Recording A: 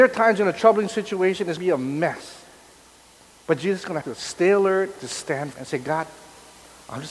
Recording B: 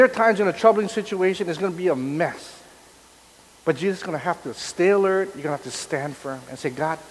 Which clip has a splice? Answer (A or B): A